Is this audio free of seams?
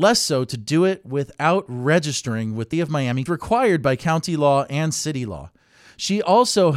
no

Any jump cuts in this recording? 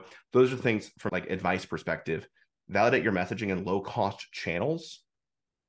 yes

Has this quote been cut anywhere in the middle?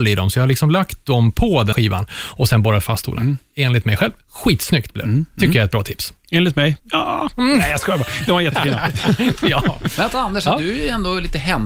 yes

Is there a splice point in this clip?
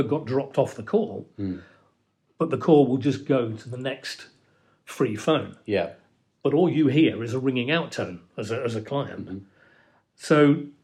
no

